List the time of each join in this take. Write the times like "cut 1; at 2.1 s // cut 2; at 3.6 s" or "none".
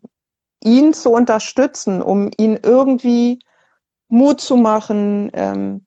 none